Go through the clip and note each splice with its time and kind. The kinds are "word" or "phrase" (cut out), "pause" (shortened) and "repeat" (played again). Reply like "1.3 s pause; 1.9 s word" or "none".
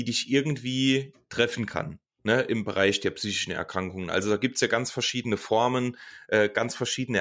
none

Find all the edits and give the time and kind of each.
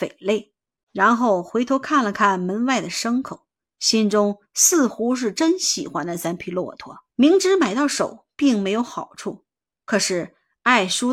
7.1 s pause

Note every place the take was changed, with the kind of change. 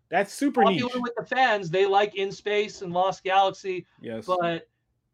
none

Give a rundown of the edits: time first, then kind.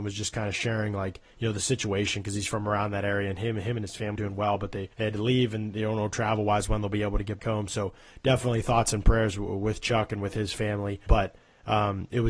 1.3 s pause; 4.2 s word; 4.9 s pause; 7.4 s word; 11.1 s word

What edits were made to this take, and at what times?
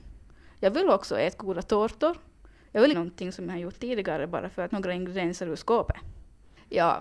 2.9 s phrase; 4.7 s phrase

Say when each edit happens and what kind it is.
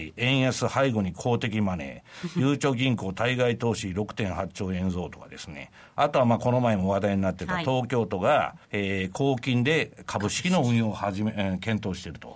8.6 s pause

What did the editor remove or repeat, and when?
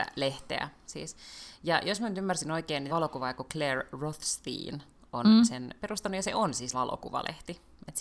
2.9 s word; 5.8 s word; 6.7 s word

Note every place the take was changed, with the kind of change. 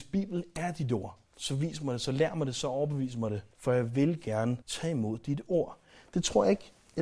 1.3 s pause; 3.5 s pause; 4.6 s pause

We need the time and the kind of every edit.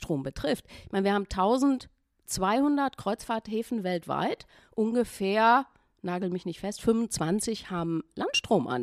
none

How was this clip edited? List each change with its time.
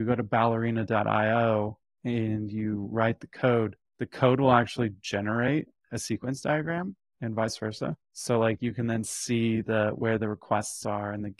3.9 s pause; 8.0 s pause

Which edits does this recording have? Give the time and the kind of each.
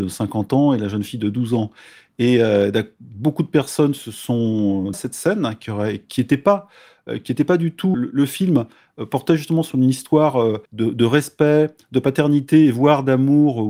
4.9 s phrase; 7.9 s word; 10.7 s pause

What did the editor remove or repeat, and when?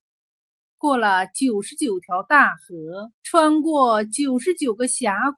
3.2 s pause

